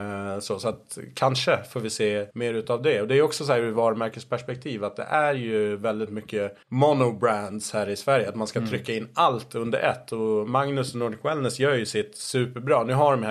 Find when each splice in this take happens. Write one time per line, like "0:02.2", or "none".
0:02.3
0:06.6